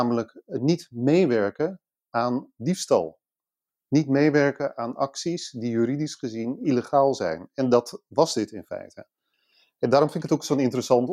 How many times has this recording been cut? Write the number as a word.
zero